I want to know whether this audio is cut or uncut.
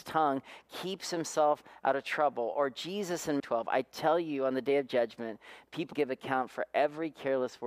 cut